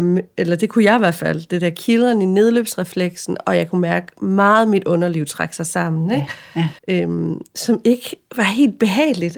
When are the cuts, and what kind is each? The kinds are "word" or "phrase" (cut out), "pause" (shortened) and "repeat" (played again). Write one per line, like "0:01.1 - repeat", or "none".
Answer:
0:06.8 - pause

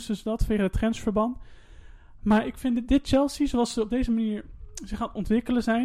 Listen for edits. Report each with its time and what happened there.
none

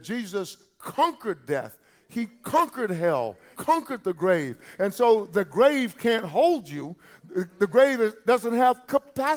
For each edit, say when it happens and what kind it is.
0:03.5 - word

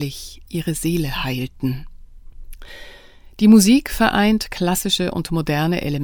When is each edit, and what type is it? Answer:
none

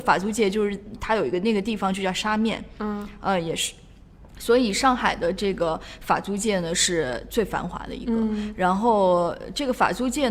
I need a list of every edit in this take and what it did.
0:04.3 - pause

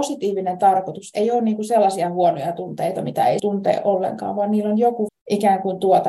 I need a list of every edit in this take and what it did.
0:03.4 - word
0:05.1 - word

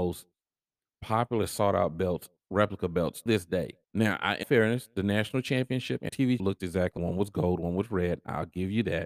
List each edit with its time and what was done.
0:03.3 - word
0:03.8 - pause
0:04.4 - word
0:06.1 - word
0:06.4 - word
0:07.0 - word

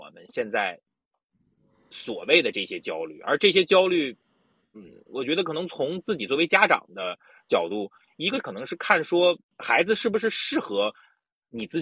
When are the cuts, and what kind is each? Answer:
0:09.4 - pause

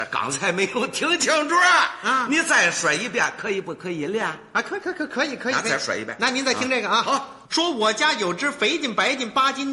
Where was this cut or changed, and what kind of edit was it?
0:07.4 - pause

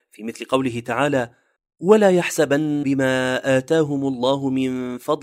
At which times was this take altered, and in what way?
0:02.8 - phrase

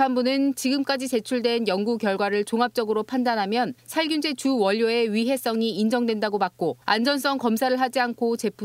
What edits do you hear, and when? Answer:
0:03.8 - pause
0:06.8 - pause

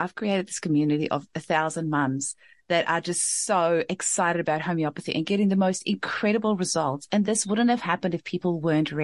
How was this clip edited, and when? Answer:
none

